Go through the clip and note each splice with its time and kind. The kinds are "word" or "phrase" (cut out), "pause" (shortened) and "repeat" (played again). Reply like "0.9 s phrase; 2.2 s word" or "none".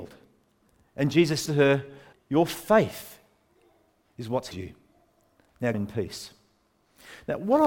1.5 s word; 2.1 s word; 4.5 s word; 5.7 s word